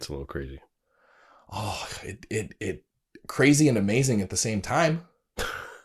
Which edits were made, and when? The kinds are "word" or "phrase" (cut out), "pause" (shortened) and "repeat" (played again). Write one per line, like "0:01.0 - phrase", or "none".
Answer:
none